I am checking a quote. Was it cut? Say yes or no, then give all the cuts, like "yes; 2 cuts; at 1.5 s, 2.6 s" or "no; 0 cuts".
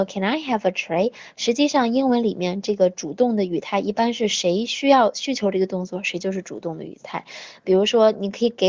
no; 0 cuts